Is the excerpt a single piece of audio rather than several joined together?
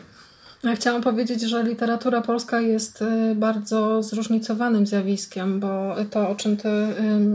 yes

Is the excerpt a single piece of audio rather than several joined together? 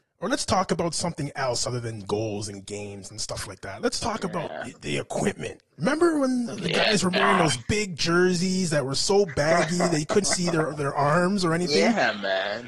no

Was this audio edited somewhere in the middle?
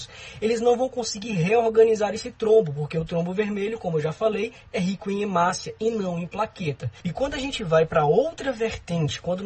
no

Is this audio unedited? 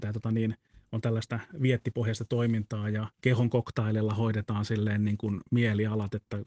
no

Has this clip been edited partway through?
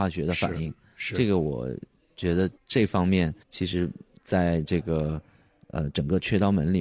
yes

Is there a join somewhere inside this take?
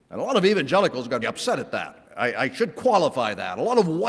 yes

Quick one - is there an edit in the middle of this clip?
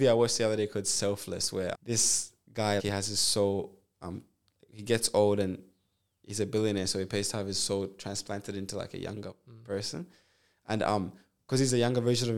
yes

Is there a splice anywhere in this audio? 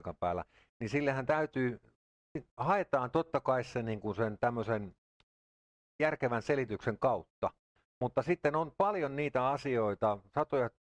no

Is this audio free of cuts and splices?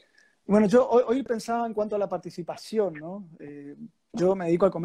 yes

